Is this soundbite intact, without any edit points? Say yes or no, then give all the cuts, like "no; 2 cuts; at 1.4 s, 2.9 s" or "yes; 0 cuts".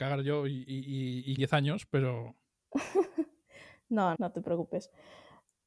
no; 2 cuts; at 1.4 s, 4.2 s